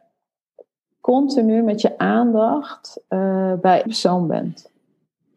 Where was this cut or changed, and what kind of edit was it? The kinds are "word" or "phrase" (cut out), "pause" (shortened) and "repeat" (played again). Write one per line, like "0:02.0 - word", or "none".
0:03.9 - word